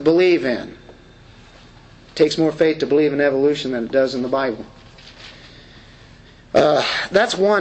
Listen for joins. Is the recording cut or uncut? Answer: uncut